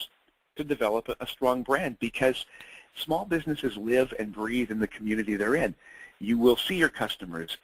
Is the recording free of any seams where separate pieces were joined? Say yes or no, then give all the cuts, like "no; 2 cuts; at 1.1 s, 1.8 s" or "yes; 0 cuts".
yes; 0 cuts